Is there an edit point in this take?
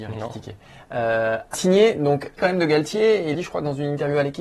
yes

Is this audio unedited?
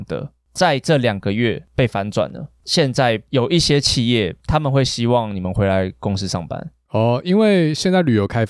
yes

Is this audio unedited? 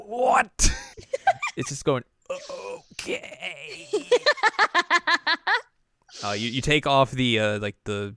no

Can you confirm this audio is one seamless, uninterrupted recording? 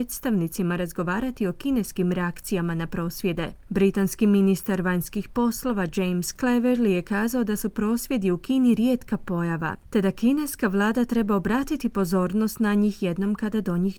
yes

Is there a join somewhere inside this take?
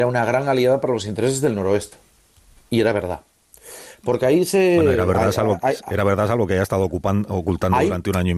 no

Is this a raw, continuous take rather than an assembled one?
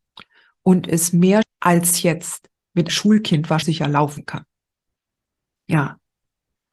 no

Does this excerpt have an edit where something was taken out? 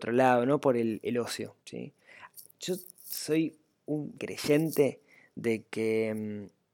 yes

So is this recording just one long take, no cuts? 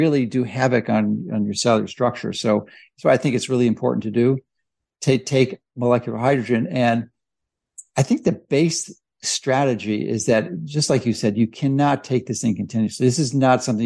yes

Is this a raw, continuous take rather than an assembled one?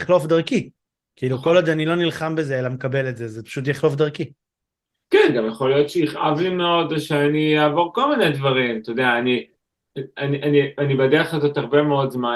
yes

